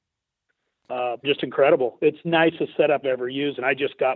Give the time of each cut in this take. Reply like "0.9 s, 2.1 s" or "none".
1.2 s, 2.2 s, 3.0 s